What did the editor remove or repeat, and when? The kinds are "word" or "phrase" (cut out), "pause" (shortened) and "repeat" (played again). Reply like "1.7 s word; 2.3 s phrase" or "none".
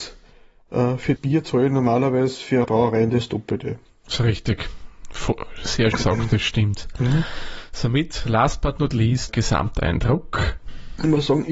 1.2 s word; 2.6 s word; 5.9 s word; 9.3 s word